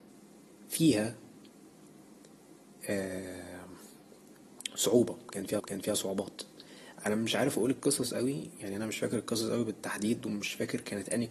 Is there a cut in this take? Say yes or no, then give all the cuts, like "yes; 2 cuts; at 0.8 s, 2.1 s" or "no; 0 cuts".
yes; 1 cut; at 5.6 s